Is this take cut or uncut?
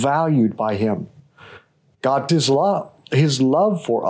cut